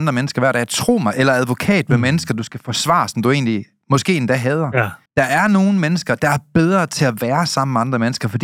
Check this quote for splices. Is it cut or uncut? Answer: cut